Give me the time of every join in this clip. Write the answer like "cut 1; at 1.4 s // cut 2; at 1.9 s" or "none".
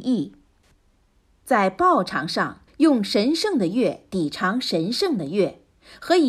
cut 1; at 2.7 s